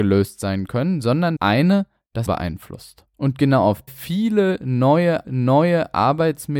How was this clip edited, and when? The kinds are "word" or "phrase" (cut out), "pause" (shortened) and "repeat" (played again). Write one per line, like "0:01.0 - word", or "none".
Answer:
0:01.4 - word
0:02.3 - word
0:03.9 - phrase
0:05.2 - repeat